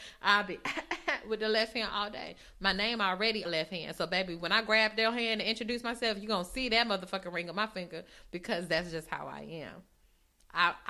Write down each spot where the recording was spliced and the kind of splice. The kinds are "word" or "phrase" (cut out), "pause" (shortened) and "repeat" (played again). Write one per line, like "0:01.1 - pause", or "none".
0:03.4 - phrase